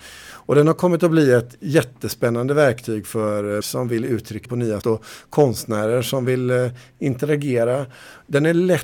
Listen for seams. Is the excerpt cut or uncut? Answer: cut